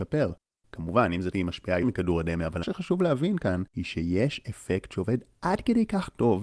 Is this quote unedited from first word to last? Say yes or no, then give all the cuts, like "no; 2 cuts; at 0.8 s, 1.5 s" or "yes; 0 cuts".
no; 4 cuts; at 1.3 s, 1.8 s, 2.6 s, 3.7 s